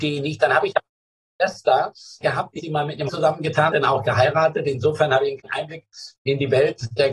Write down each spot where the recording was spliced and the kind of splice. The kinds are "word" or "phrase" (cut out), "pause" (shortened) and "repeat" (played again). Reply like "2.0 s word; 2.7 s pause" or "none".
2.2 s word; 2.6 s word; 3.1 s word; 3.7 s word; 5.4 s word